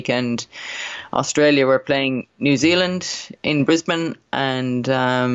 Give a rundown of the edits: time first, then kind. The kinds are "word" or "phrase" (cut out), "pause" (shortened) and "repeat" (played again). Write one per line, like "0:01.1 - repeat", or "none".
0:03.4 - pause